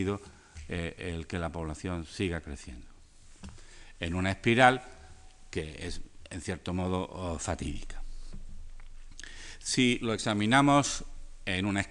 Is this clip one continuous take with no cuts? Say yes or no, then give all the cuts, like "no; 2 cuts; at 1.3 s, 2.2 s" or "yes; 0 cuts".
yes; 0 cuts